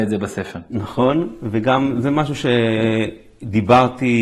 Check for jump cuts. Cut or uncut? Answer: uncut